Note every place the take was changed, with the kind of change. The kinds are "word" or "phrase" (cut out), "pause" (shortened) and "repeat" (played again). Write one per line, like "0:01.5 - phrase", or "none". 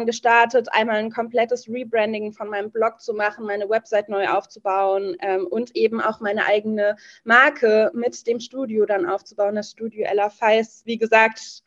none